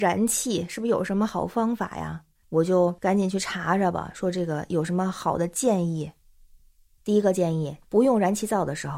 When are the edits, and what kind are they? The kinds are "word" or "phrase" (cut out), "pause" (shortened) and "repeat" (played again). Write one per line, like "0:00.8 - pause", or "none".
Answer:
0:07.8 - pause